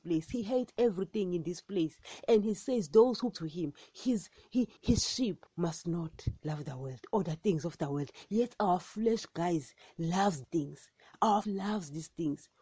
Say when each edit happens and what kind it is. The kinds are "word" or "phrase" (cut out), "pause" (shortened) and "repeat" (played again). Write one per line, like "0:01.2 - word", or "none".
0:03.3 - word
0:04.8 - pause
0:05.5 - pause
0:10.4 - word
0:11.4 - word